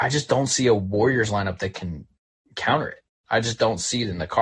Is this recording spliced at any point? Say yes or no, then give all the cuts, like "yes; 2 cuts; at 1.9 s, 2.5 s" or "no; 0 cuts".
no; 0 cuts